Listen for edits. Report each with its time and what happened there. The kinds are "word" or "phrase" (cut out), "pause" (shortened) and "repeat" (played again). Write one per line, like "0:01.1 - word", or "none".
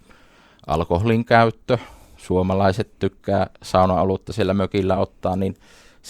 none